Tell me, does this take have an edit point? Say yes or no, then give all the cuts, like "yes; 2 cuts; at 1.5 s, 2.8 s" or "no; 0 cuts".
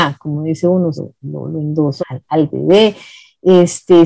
yes; 2 cuts; at 1.0 s, 2.0 s